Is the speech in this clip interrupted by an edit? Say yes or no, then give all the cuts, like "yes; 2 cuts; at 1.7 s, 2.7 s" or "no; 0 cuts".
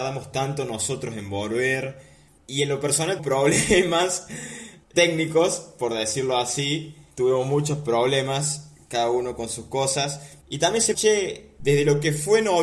yes; 4 cuts; at 3.2 s, 4.9 s, 7.1 s, 10.9 s